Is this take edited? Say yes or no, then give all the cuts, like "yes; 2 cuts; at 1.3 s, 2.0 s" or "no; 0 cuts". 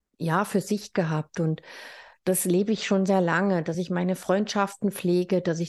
no; 0 cuts